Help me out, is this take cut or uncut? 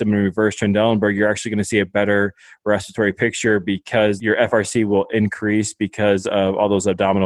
uncut